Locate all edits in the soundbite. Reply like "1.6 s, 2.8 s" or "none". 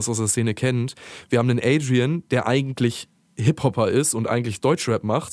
none